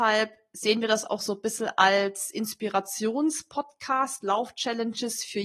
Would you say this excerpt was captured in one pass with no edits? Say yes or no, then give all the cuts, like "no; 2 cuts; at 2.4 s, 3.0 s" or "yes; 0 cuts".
yes; 0 cuts